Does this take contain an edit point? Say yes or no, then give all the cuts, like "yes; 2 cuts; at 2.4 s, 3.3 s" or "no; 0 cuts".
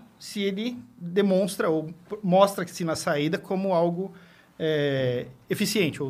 no; 0 cuts